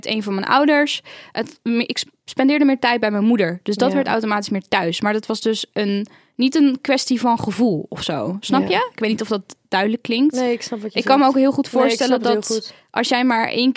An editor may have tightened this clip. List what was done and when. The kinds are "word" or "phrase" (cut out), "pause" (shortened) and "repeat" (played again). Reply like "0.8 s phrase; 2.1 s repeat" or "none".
none